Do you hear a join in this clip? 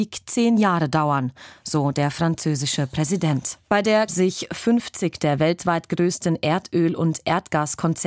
yes; 2 cuts; at 3.6 s, 4.1 s

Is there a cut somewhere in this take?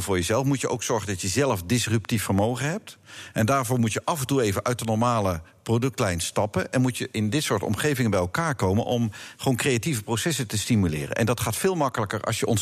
no; 0 cuts

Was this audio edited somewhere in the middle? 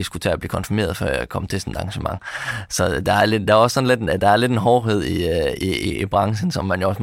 no; 0 cuts

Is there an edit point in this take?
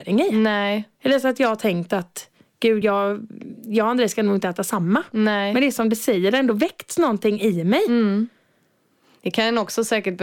no; 0 cuts

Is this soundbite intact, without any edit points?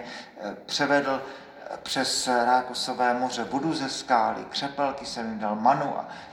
yes; 0 cuts

